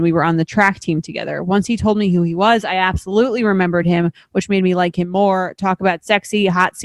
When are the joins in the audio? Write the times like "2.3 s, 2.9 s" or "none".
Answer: none